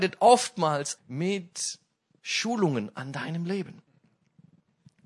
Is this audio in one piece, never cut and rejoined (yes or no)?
no